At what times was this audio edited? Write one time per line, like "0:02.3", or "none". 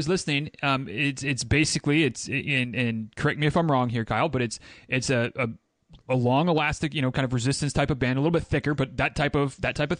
0:06.0